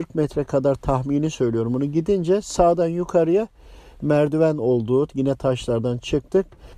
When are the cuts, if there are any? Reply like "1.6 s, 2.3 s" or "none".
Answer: none

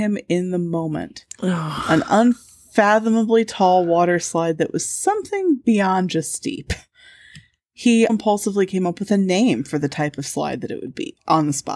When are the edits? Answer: 8.1 s

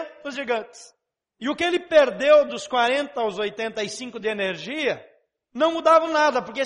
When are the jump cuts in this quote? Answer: none

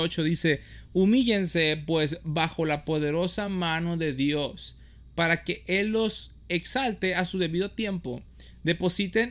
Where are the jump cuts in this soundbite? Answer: none

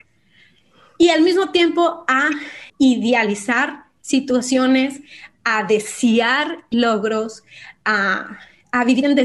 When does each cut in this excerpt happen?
2.7 s

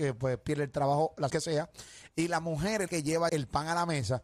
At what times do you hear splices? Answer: 1.3 s, 2.9 s, 3.3 s

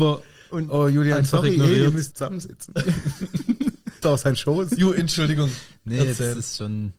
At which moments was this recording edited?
2.1 s, 4.0 s

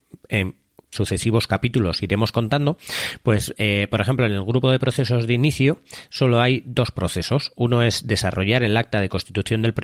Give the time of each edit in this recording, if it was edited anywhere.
0.9 s

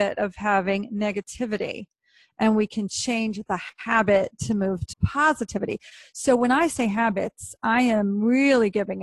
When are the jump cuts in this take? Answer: 4.9 s

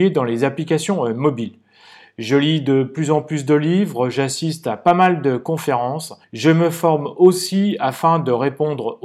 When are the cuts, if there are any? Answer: 6.2 s

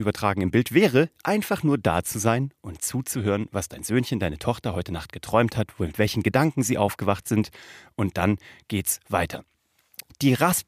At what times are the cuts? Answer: none

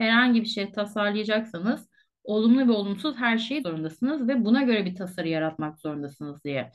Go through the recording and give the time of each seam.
3.6 s

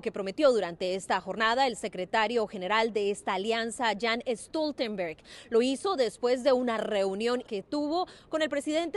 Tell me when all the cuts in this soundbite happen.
7.4 s

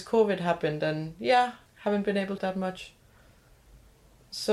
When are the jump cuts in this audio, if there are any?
1.7 s, 2.4 s

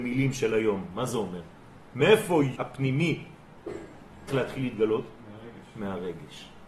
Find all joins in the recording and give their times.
2.6 s, 4.3 s

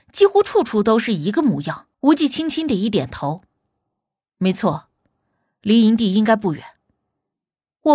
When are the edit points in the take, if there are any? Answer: 1.9 s

